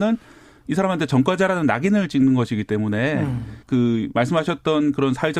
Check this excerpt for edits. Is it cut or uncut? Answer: cut